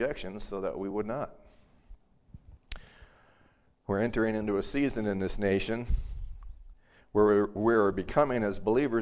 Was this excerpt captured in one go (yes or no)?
yes